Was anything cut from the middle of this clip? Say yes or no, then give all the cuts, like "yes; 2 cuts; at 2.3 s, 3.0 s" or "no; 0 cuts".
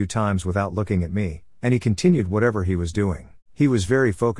yes; 1 cut; at 3.4 s